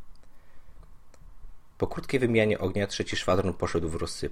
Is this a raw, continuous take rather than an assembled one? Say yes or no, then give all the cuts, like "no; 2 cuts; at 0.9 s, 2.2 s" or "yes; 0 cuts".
yes; 0 cuts